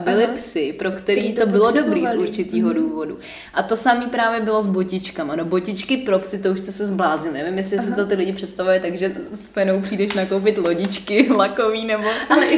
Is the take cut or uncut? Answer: uncut